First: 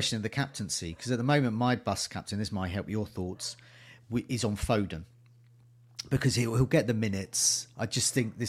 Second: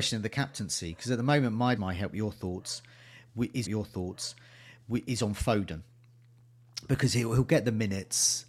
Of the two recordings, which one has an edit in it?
second; 2 cuts; at 1.8 s, 3.6 s

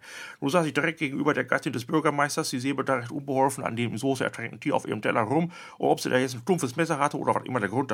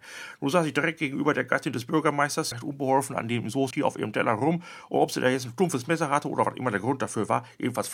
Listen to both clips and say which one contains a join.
second; 2 cuts; at 2.5 s, 3.7 s

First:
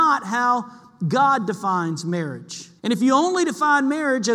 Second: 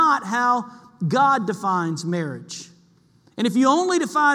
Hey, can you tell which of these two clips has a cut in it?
first; 1 cut; at 2.8 s

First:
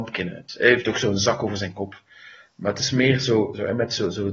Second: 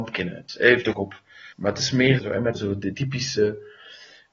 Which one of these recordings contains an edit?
second; 5 cuts; at 0.9 s, 1.5 s, 2.2 s, 2.5 s, 2.9 s

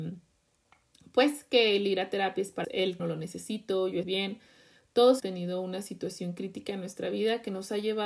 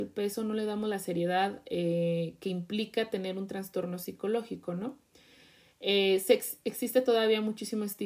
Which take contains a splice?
first; 4 cuts; at 2.6 s, 3.0 s, 4.0 s, 5.2 s

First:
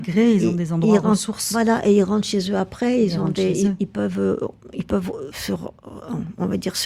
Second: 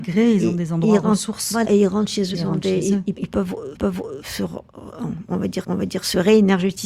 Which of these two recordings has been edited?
second; 5 cuts; at 1.6 s, 2.3 s, 3.1 s, 3.8 s, 5.6 s

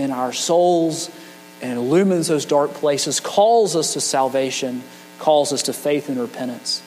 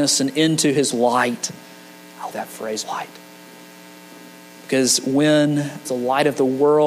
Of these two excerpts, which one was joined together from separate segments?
second; 4 cuts; at 0.9 s, 2.3 s, 2.8 s, 5.9 s

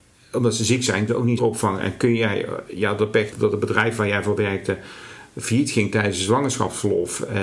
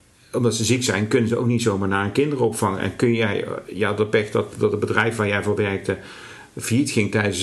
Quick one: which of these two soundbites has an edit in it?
first; 3 cuts; at 1.1 s, 1.4 s, 3.3 s

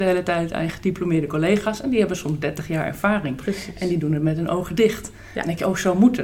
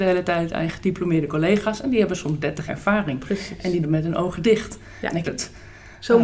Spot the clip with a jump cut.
second; 3 cuts; at 2.7 s, 3.8 s, 5.2 s

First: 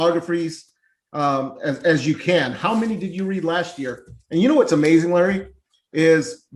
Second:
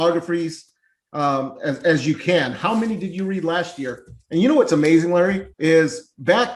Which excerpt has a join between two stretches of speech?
second; 1 cut; at 5.5 s

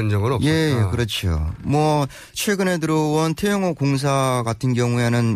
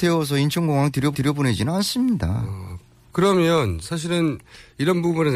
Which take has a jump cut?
second; 1 cut; at 1.1 s

